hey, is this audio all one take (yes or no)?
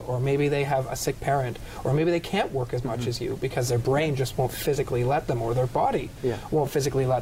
yes